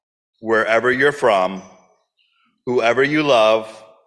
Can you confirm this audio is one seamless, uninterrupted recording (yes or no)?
yes